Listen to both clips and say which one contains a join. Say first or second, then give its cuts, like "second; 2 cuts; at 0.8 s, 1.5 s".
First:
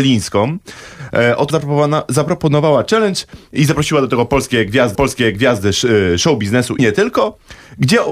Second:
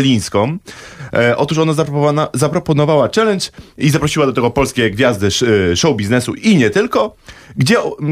first; 3 cuts; at 1.5 s, 4.9 s, 6.8 s